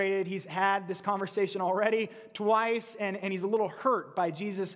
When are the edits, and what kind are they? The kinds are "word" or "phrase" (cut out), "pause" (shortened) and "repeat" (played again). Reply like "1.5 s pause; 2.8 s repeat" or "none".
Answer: none